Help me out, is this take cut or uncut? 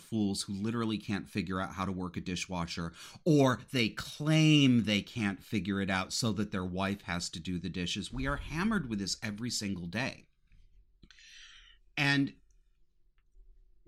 uncut